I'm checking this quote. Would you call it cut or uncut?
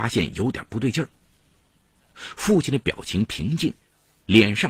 uncut